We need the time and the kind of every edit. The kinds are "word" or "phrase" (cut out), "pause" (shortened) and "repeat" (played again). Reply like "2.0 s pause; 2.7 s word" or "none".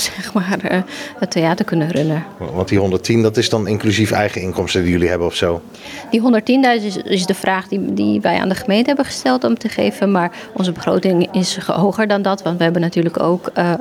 none